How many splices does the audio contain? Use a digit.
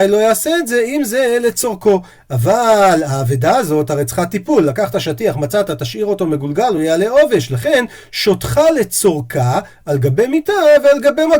0